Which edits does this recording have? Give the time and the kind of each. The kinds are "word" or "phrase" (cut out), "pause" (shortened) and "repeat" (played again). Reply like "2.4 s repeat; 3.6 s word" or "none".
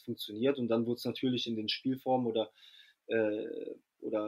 none